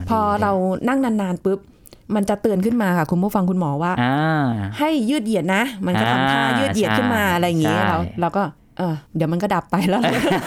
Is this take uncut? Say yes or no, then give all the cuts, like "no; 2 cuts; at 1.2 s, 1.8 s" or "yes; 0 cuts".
no; 2 cuts; at 8.6 s, 9.1 s